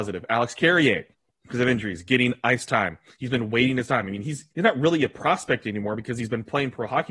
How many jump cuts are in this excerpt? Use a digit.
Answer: 2